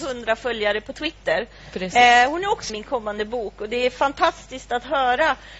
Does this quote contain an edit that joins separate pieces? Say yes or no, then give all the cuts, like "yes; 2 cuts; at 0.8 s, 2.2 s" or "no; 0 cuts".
yes; 1 cut; at 2.7 s